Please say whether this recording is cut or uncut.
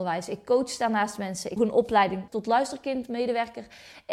cut